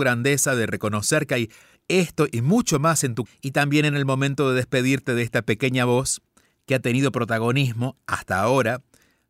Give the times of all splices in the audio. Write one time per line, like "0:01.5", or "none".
0:03.3